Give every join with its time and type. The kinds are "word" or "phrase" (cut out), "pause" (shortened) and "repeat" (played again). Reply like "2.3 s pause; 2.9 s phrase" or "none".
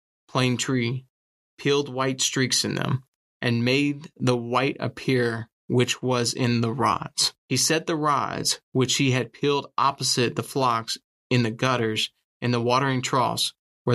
7.4 s pause